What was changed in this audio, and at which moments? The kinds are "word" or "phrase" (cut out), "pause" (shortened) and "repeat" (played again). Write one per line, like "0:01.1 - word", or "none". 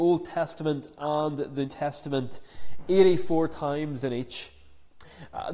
0:01.7 - word